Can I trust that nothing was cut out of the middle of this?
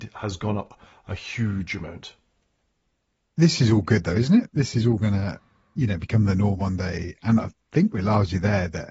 yes; 0 cuts

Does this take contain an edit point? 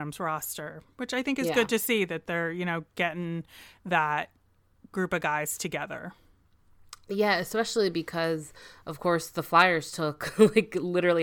no; 0 cuts

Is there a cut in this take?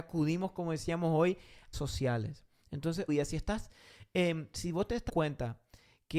yes; 3 cuts; at 1.7 s, 3.1 s, 5.1 s

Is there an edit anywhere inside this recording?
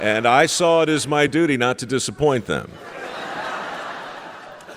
no; 0 cuts

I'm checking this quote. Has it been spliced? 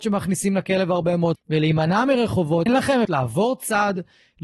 yes; 3 cuts; at 1.4 s, 2.7 s, 3.0 s

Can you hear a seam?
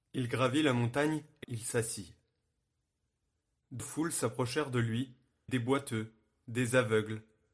yes; 3 cuts; at 1.4 s, 3.8 s, 5.5 s

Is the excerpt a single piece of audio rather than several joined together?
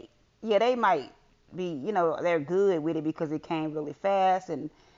yes; 0 cuts

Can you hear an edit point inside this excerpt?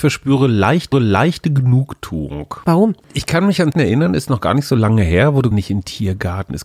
yes; 3 cuts; at 0.9 s, 3.7 s, 5.5 s

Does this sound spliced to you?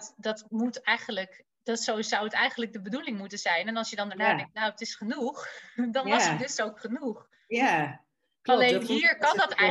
no; 0 cuts

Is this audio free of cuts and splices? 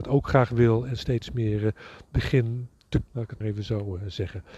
no; 2 cuts; at 3.1 s, 3.4 s

